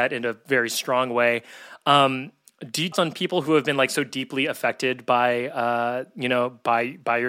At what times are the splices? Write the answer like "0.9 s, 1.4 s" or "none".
2.9 s